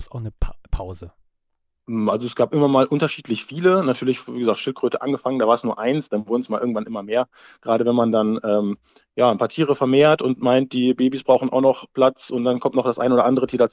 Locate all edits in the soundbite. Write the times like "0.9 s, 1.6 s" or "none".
none